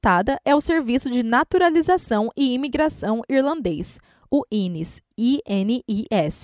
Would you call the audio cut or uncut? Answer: uncut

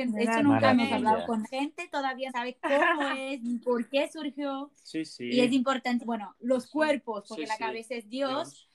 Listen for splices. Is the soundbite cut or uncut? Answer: cut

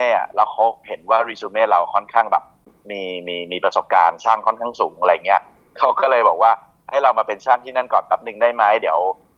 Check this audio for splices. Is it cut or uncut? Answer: uncut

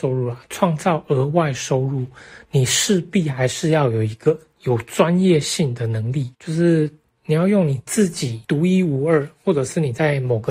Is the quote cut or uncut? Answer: cut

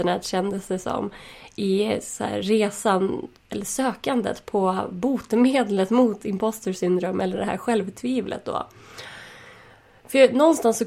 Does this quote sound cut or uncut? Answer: uncut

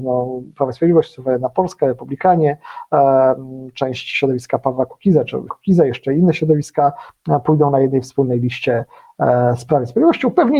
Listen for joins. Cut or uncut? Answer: cut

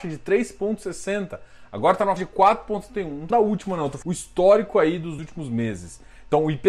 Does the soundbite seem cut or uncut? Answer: cut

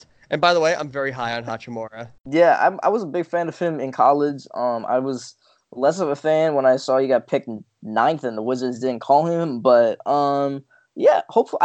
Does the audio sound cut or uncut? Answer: cut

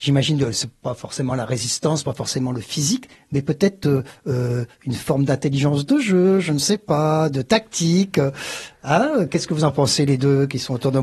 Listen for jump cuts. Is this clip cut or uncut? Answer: uncut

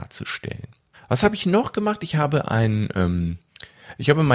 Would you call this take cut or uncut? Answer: cut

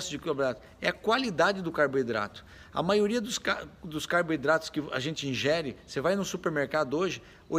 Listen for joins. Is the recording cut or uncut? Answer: uncut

